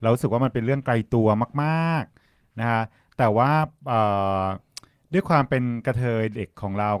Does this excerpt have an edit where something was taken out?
no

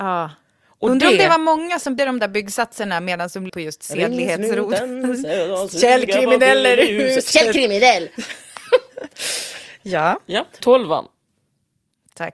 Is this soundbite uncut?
no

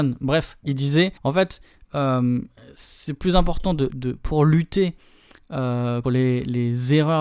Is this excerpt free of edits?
no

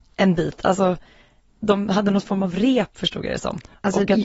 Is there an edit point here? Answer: no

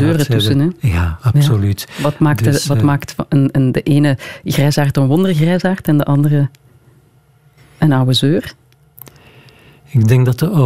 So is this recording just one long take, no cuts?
yes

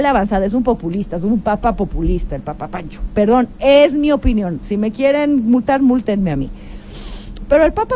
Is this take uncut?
yes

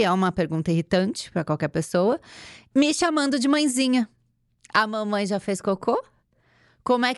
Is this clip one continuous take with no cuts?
yes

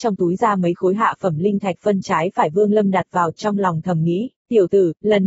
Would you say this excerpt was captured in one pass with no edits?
no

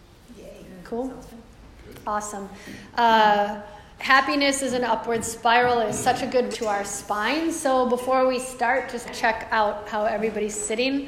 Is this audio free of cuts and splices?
no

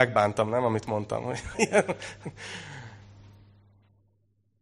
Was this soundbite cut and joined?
yes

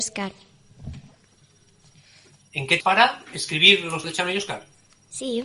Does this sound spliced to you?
yes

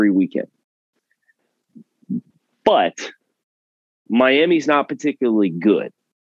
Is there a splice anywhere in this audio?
no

